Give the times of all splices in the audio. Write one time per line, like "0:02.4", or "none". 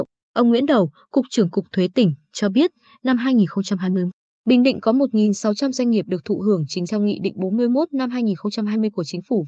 0:06.9